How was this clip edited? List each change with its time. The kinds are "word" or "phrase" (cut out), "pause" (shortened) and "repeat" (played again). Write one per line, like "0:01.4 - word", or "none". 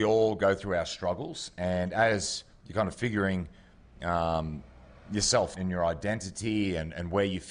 0:05.5 - word